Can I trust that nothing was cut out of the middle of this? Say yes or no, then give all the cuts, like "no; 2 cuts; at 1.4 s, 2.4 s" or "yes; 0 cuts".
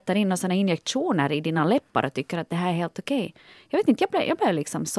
yes; 0 cuts